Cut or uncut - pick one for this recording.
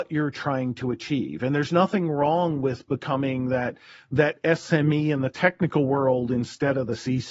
uncut